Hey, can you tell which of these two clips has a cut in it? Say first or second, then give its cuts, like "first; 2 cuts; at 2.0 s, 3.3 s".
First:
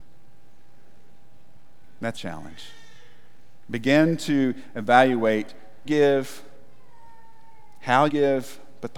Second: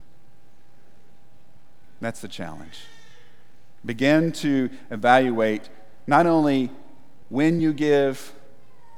first; 3 cuts; at 2.1 s, 5.9 s, 8.1 s